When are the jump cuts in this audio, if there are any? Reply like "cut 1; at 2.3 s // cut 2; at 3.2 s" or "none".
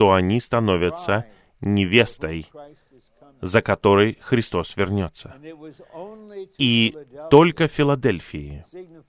none